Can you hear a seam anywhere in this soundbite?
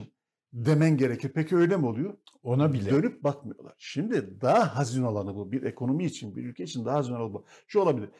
no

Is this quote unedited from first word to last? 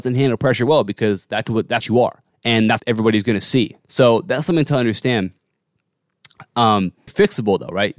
no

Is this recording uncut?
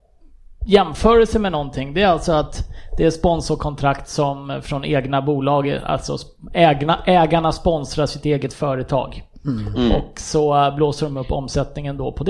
yes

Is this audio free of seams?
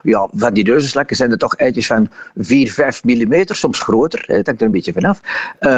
yes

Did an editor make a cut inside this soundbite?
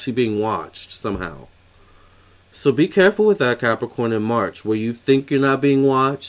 no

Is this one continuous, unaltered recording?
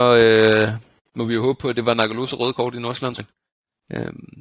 no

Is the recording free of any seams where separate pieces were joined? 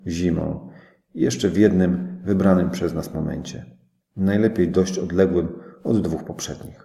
yes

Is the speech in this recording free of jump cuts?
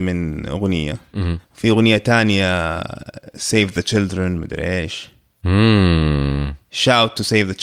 no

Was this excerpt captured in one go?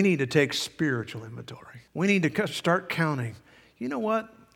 no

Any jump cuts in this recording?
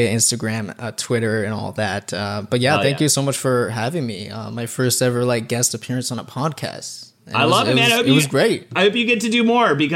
no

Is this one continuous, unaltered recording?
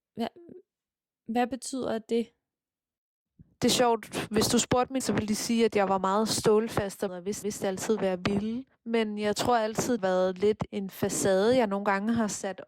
no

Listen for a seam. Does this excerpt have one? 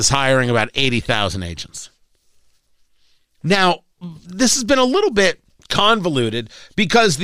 yes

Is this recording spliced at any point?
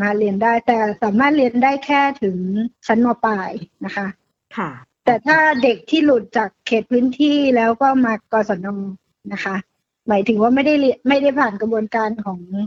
no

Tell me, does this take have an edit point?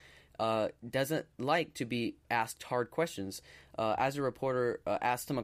yes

